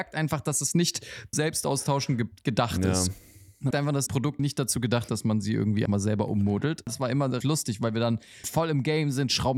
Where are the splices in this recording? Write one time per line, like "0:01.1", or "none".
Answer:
0:01.3
0:03.7
0:04.1
0:04.4
0:05.1
0:05.9
0:07.4
0:08.4